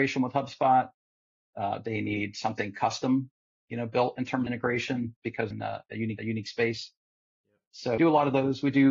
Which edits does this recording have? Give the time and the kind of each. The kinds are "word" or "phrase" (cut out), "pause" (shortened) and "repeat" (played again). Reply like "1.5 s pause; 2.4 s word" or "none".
4.5 s phrase; 5.5 s word; 6.2 s repeat; 8.0 s word

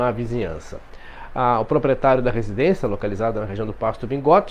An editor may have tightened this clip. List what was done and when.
none

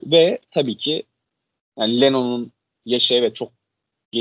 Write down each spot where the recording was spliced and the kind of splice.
none

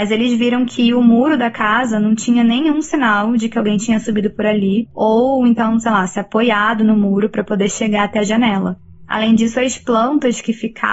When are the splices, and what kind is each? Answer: 4.9 s pause

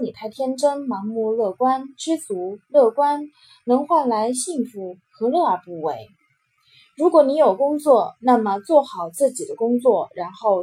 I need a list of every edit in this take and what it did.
none

